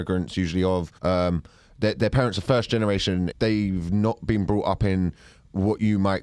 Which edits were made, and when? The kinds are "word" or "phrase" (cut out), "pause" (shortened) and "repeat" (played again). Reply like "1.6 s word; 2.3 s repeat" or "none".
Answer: 1.0 s pause; 3.3 s phrase